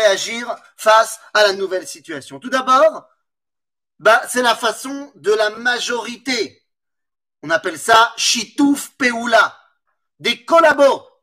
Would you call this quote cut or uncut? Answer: uncut